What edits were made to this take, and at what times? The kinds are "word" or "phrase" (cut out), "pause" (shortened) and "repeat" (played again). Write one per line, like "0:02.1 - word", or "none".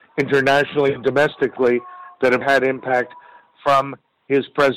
0:02.4 - word